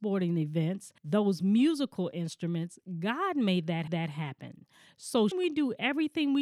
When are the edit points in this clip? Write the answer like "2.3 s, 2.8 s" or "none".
1.0 s, 3.9 s, 5.3 s